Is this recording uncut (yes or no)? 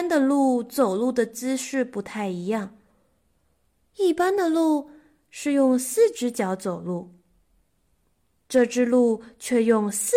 yes